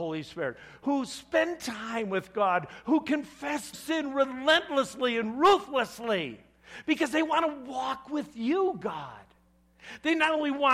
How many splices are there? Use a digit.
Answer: 1